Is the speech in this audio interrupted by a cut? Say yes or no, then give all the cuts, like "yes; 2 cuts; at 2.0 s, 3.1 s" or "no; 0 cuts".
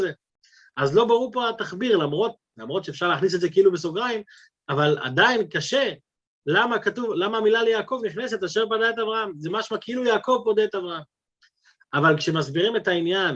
no; 0 cuts